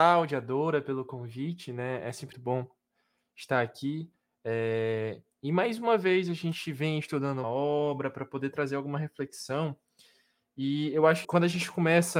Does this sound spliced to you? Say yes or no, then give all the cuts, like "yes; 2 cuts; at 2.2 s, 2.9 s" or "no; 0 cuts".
yes; 3 cuts; at 2.3 s, 7.4 s, 11.2 s